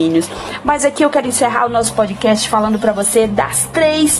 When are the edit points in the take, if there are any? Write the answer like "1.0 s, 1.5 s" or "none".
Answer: none